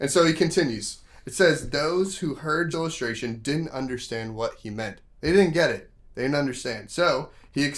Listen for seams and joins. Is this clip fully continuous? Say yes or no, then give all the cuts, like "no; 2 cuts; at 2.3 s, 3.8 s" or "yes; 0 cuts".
no; 1 cut; at 2.7 s